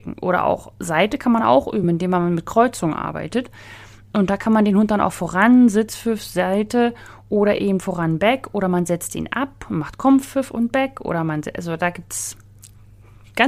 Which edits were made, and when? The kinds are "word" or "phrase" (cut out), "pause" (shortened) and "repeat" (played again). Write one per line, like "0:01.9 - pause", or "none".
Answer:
none